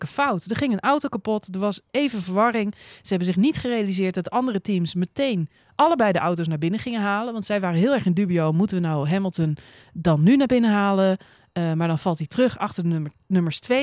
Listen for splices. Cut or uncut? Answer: uncut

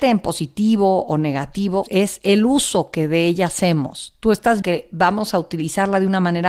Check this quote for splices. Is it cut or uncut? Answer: cut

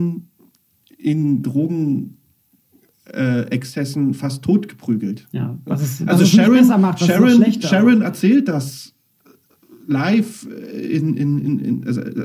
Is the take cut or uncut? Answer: uncut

